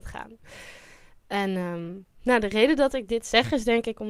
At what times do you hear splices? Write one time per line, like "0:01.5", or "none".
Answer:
0:02.1